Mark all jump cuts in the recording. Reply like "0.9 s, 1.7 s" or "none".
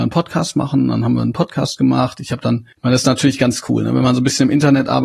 2.7 s